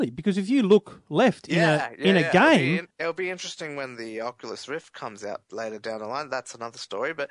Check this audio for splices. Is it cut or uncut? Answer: cut